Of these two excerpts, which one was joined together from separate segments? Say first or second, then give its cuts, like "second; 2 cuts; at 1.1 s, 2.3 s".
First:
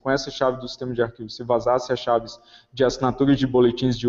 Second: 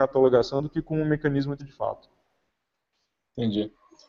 second; 1 cut; at 1.6 s